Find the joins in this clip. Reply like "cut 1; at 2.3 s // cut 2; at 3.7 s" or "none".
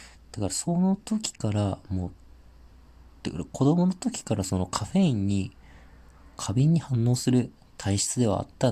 none

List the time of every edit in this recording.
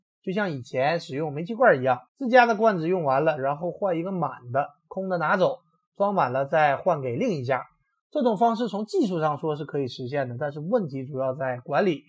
cut 1; at 2.1 s

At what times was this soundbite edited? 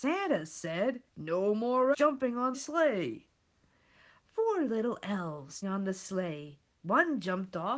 cut 1; at 1.1 s // cut 2; at 1.9 s // cut 3; at 2.5 s // cut 4; at 5.6 s

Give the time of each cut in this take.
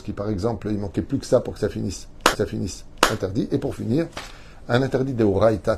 cut 1; at 2.3 s

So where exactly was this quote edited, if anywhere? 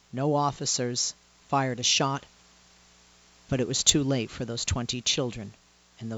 none

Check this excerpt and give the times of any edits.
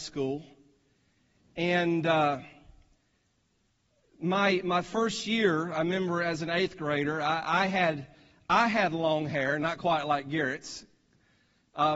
none

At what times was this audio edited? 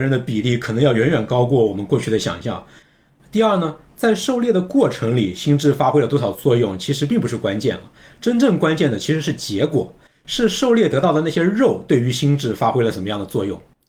none

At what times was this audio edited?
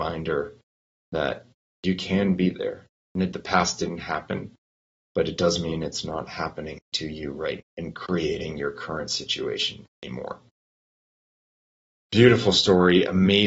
cut 1; at 3.3 s // cut 2; at 7.6 s

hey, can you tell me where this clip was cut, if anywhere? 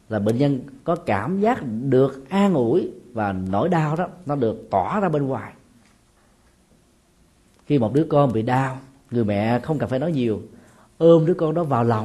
none

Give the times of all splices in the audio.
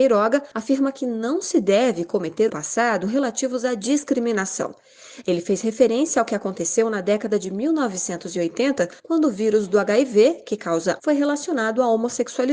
cut 1; at 2.5 s // cut 2; at 9.0 s // cut 3; at 11.0 s

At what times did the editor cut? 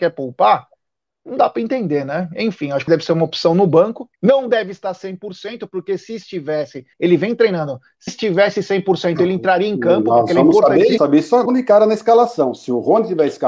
cut 1; at 2.9 s // cut 2; at 4.2 s // cut 3; at 6.9 s // cut 4; at 8.1 s // cut 5; at 11.0 s // cut 6; at 11.5 s

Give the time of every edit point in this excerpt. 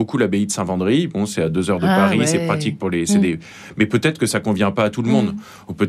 none

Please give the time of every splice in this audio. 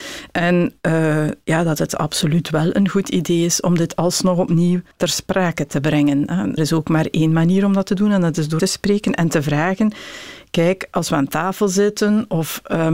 cut 1; at 4.9 s // cut 2; at 6.6 s // cut 3; at 8.6 s

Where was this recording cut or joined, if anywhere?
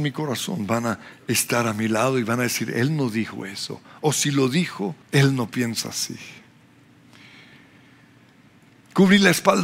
cut 1; at 5.0 s

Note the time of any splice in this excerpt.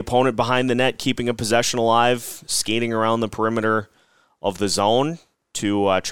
none

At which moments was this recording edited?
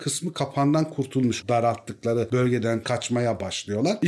cut 1; at 1.4 s // cut 2; at 2.8 s

